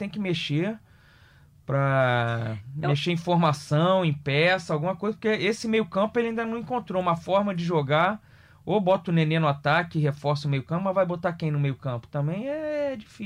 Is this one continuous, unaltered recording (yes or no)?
yes